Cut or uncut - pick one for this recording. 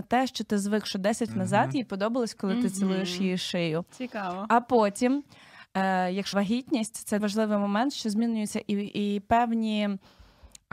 cut